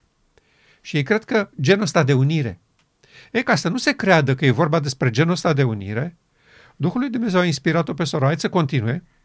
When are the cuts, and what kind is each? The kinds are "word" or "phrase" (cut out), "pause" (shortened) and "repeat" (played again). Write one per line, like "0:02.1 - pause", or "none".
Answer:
0:01.5 - pause